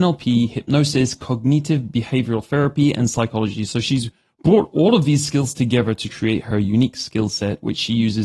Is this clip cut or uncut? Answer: uncut